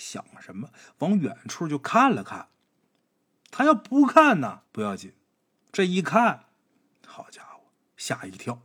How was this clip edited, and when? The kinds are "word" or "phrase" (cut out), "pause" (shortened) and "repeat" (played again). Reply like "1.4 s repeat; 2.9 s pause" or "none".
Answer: 4.7 s pause